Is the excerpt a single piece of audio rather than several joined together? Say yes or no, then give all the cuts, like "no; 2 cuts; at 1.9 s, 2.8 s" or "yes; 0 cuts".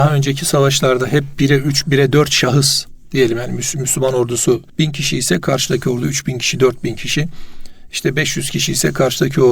no; 1 cut; at 4.7 s